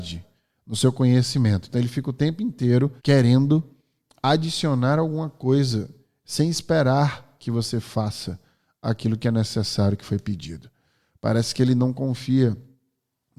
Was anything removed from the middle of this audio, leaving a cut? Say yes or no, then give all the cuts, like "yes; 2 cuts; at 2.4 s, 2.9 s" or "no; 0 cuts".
yes; 1 cut; at 3.0 s